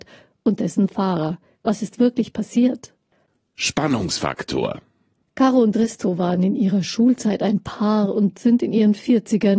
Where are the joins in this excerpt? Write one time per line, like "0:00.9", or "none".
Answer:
none